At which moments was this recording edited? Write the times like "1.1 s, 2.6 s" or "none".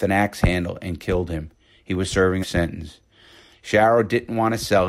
2.4 s